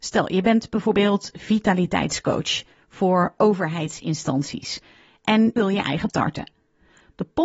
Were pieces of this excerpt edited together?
yes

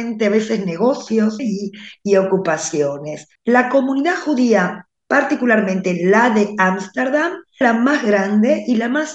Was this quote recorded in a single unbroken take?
no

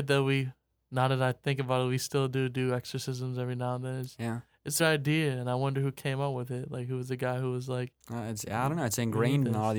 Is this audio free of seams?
no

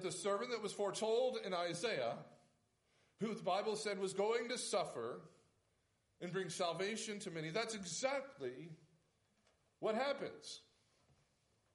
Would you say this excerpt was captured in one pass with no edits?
yes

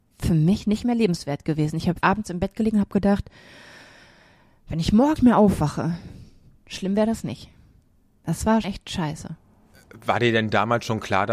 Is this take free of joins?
no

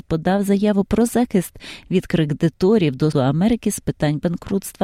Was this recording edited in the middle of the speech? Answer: yes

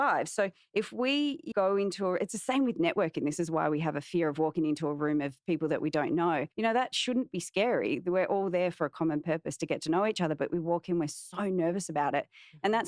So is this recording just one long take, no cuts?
no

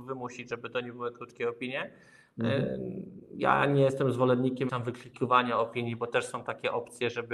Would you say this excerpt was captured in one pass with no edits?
no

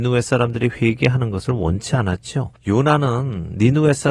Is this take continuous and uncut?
no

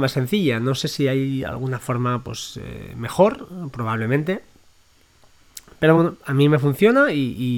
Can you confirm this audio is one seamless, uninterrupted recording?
yes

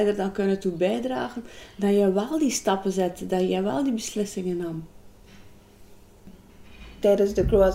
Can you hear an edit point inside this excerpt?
no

